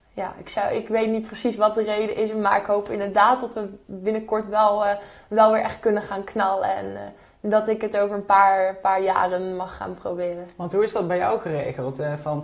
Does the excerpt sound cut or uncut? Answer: uncut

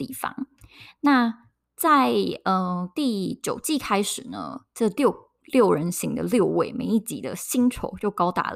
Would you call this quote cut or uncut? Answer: uncut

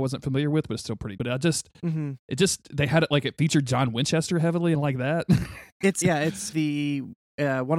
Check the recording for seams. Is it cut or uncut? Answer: cut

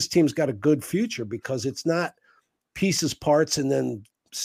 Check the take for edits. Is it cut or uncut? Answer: uncut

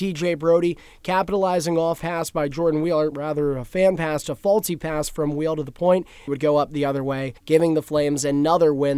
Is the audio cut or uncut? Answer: cut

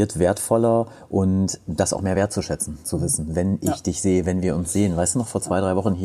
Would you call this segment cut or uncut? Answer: uncut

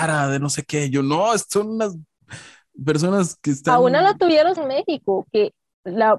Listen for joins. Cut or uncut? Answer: cut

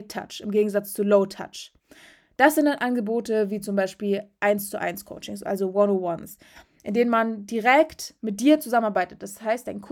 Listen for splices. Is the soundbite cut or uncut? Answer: uncut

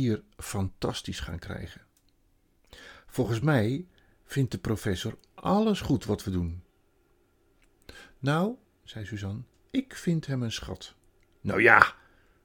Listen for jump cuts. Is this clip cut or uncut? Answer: uncut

